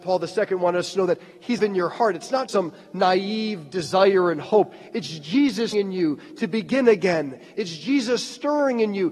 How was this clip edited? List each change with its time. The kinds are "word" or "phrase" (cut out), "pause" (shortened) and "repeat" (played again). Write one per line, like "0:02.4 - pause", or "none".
0:01.6 - word
0:02.5 - word
0:05.7 - word

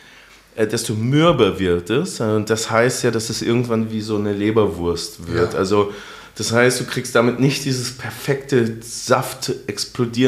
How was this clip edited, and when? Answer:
none

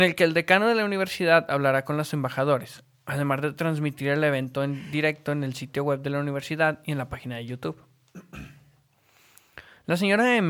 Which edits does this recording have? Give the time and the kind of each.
none

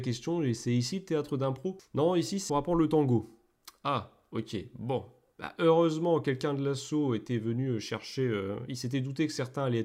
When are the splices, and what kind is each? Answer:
0:02.5 - word

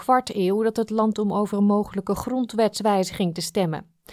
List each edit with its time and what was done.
0:01.1 - word

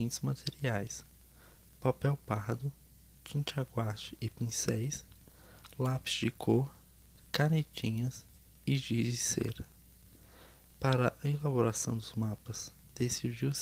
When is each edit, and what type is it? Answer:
none

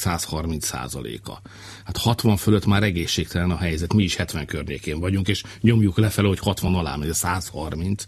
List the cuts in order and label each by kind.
none

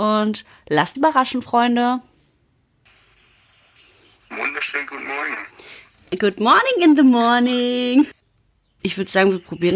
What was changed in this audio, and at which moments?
0:00.9 - word

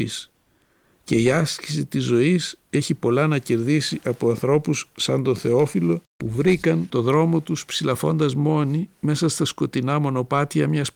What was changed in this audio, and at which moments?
none

